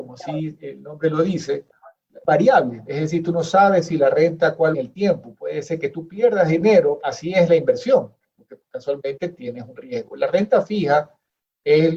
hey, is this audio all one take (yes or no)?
no